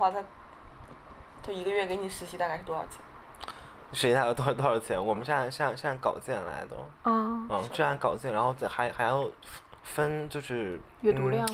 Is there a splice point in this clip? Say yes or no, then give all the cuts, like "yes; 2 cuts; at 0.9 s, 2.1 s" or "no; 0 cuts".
yes; 2 cuts; at 7.0 s, 9.8 s